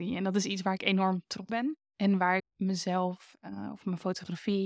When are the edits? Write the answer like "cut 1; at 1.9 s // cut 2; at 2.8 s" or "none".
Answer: cut 1; at 1.5 s // cut 2; at 1.8 s // cut 3; at 2.4 s

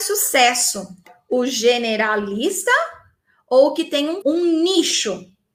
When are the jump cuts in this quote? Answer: cut 1; at 4.2 s

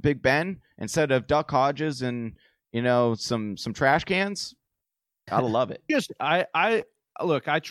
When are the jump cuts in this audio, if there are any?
none

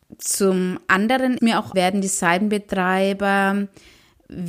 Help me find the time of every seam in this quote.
cut 1; at 1.4 s // cut 2; at 1.7 s

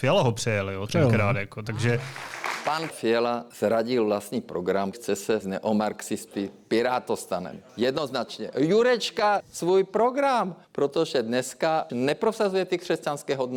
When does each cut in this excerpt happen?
cut 1; at 2.9 s // cut 2; at 3.5 s // cut 3; at 4.9 s // cut 4; at 5.4 s // cut 5; at 7.7 s // cut 6; at 9.4 s // cut 7; at 10.6 s // cut 8; at 11.9 s

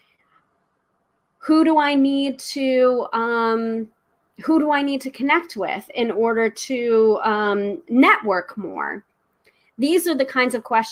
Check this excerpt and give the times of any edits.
none

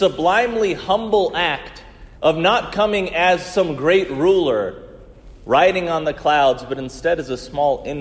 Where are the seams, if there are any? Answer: cut 1; at 2.2 s

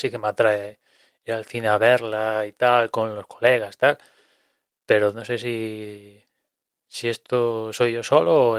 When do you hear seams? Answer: none

